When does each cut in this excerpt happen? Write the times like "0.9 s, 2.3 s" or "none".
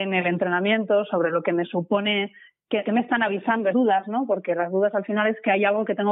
2.8 s, 3.7 s